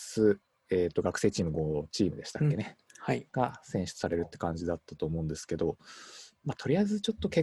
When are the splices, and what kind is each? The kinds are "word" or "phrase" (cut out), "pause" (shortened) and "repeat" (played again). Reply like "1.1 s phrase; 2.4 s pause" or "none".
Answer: 3.3 s pause